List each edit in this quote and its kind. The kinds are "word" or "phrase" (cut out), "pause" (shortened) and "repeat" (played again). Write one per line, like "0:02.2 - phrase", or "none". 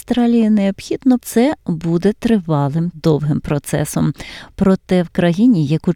0:01.2 - phrase
0:02.9 - word